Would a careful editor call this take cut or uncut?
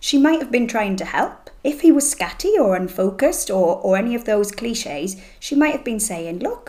cut